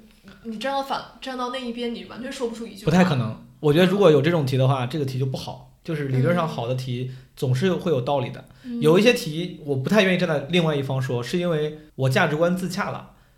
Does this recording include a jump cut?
yes; 1 cut; at 11.9 s

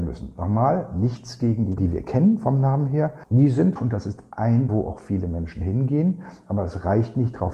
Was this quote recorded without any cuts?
no; 3 cuts; at 1.8 s, 3.8 s, 4.7 s

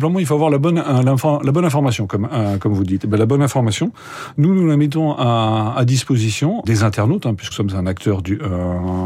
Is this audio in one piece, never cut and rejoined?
no; 2 cuts; at 6.6 s, 7.5 s

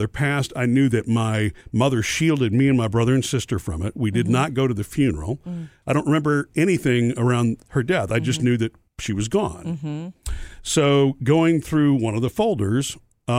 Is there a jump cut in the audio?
yes; 2 cuts; at 1.6 s, 8.9 s

